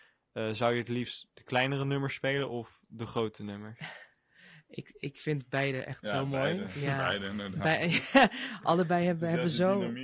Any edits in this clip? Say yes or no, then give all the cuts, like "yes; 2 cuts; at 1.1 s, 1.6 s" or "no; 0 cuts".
no; 0 cuts